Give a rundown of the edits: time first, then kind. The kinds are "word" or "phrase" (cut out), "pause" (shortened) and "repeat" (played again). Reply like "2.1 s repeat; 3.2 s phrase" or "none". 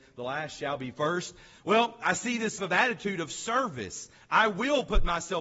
2.6 s word